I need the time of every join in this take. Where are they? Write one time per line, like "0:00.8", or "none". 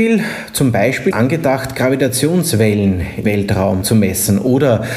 0:01.1
0:03.2
0:03.8